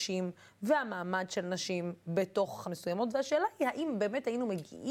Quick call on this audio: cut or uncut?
cut